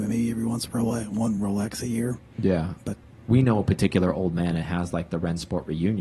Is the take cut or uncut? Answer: uncut